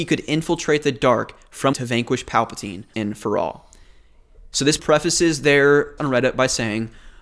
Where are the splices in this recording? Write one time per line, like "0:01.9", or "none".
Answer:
0:01.7
0:02.9
0:04.8
0:06.0